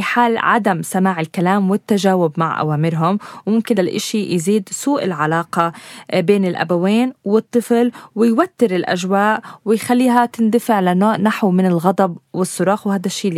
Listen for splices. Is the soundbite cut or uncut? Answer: cut